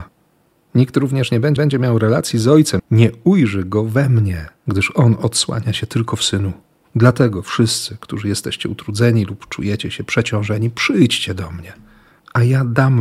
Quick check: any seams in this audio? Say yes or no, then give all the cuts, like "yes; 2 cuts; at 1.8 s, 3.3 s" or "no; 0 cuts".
yes; 4 cuts; at 1.6 s, 2.8 s, 4.6 s, 6.7 s